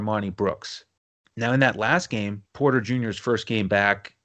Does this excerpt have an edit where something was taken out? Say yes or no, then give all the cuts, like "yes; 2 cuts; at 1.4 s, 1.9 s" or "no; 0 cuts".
yes; 2 cuts; at 1.0 s, 2.5 s